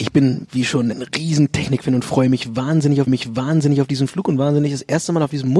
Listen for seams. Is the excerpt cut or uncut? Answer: cut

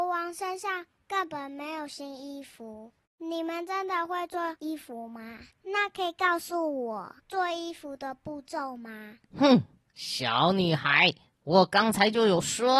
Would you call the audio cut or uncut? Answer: cut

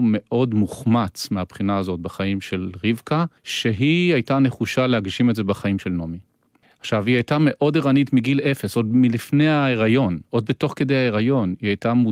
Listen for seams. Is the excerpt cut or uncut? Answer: cut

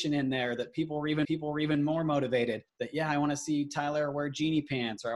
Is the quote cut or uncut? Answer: cut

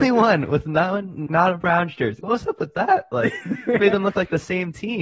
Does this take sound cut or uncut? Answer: cut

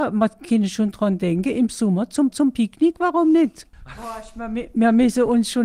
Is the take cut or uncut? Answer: cut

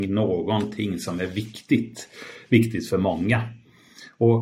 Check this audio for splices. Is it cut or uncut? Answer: uncut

